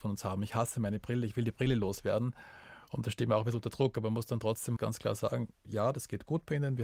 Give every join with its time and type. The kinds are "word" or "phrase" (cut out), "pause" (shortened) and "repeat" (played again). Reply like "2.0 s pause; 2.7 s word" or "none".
4.8 s word

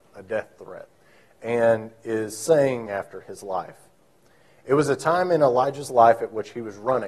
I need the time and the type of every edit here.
2.9 s phrase

